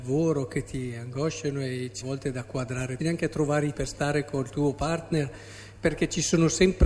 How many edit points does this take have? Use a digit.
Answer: 3